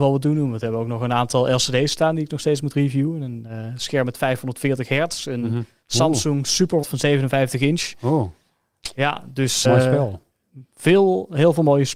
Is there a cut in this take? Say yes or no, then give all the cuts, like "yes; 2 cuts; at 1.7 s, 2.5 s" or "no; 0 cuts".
yes; 2 cuts; at 6.8 s, 9.6 s